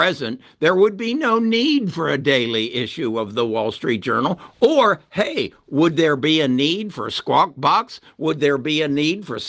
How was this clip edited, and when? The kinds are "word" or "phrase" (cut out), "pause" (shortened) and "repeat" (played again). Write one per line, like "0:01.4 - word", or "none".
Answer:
none